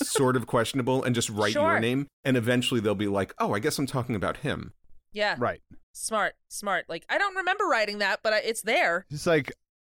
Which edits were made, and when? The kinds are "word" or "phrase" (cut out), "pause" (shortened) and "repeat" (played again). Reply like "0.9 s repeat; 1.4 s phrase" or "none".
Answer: 2.1 s pause; 5.8 s pause